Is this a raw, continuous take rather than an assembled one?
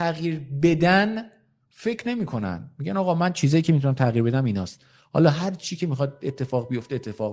yes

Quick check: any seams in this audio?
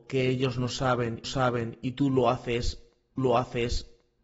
yes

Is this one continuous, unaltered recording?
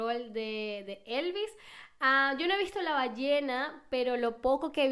yes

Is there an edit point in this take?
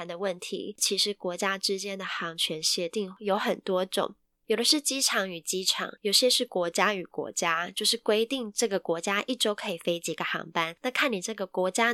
no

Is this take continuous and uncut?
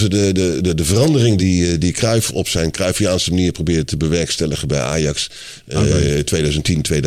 yes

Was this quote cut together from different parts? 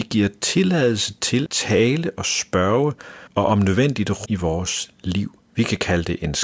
yes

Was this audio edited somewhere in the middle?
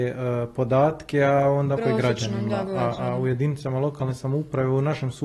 yes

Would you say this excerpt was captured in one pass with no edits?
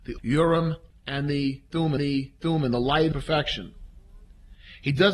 no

